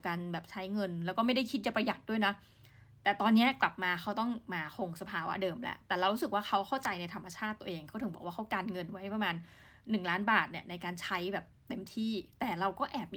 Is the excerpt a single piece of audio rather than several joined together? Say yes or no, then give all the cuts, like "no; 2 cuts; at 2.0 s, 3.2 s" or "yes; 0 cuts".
yes; 0 cuts